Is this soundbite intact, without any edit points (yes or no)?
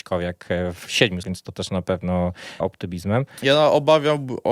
no